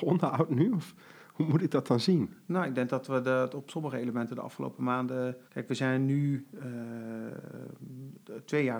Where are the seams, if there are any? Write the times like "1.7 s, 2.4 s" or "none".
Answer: 5.5 s